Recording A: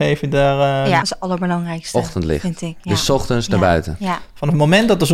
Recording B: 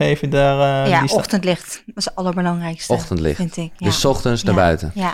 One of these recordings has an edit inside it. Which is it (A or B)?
A